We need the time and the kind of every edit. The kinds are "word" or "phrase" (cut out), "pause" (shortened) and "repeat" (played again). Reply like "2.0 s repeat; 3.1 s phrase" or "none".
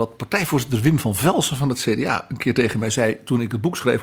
none